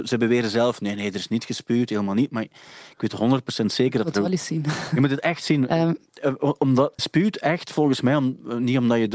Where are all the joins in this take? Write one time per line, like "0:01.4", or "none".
0:07.0